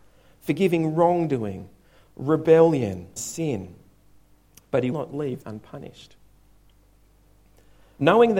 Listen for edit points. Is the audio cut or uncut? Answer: cut